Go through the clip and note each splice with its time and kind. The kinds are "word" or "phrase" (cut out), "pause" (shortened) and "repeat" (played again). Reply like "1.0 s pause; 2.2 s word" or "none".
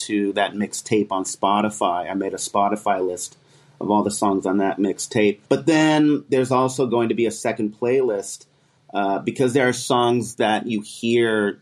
5.5 s pause